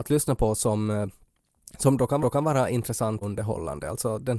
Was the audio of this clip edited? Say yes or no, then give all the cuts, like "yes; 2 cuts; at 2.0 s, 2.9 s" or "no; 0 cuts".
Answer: yes; 2 cuts; at 2.2 s, 3.2 s